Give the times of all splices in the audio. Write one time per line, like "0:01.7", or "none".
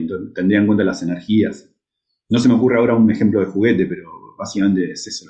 none